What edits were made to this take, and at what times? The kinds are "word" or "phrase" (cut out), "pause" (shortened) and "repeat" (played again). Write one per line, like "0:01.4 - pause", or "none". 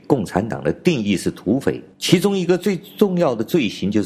0:01.9 - pause